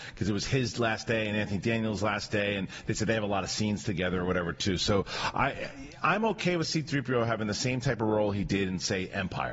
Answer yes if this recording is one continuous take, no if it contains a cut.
yes